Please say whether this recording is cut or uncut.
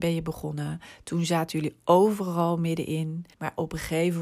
cut